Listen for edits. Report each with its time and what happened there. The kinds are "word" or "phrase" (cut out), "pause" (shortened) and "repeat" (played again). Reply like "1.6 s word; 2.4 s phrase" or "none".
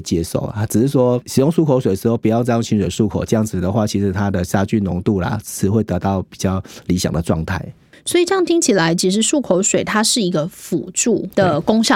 none

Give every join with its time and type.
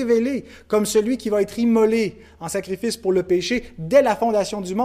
none

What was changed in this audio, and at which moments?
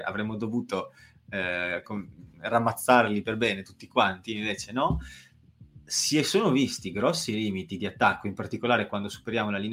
1.8 s word

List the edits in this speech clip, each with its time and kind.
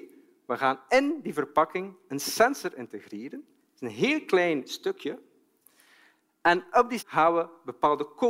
7.0 s word

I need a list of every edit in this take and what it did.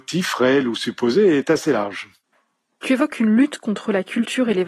none

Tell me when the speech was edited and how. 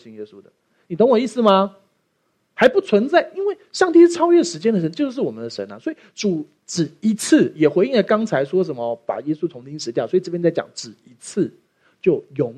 none

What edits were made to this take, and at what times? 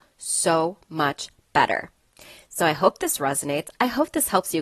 none

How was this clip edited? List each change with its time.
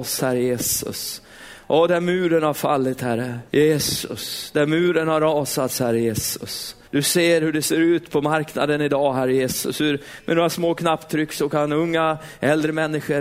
3.5 s pause; 6.8 s pause

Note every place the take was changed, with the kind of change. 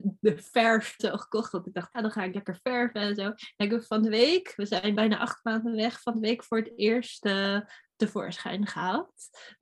1.0 s word; 1.9 s word; 4.9 s word

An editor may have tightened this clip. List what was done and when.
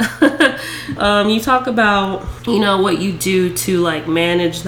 1.0 s word

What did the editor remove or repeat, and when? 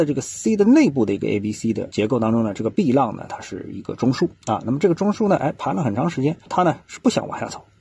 none

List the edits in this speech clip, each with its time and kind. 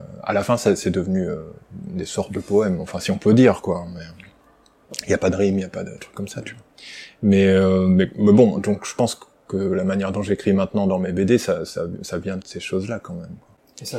12.4 s word

